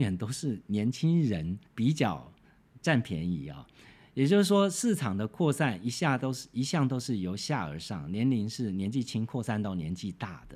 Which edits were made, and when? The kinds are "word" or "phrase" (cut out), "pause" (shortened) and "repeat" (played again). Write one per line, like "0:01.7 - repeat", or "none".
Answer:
0:01.7 - pause